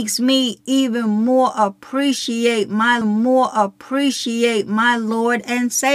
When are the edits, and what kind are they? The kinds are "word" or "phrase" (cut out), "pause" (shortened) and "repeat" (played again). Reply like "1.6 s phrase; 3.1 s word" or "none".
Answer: 3.0 s repeat